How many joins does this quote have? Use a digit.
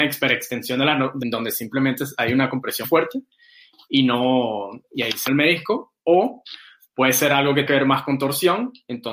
4